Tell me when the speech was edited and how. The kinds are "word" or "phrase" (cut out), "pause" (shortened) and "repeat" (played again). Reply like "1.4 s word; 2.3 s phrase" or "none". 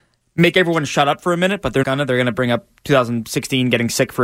1.8 s word

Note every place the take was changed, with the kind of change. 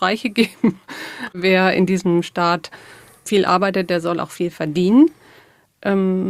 none

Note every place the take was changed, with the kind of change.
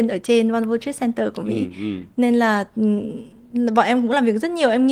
none

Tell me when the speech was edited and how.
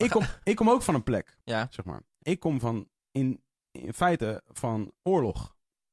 1.4 s pause; 2.2 s phrase; 3.0 s pause

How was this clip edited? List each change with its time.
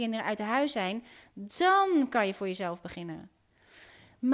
none

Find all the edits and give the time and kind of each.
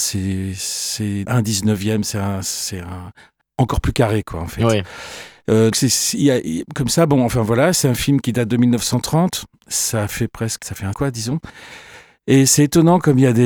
1.2 s word; 5.7 s word; 10.6 s word; 10.9 s word

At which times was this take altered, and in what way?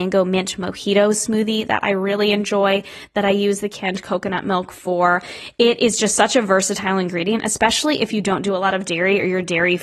none

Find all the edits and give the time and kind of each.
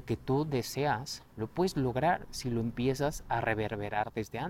none

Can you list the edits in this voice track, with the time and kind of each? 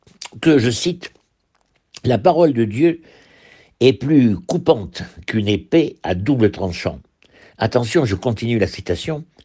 none

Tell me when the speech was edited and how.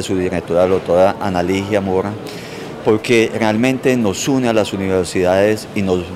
none

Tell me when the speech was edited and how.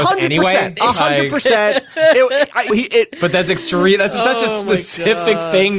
2.7 s word

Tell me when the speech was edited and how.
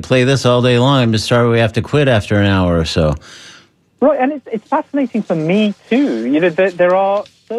none

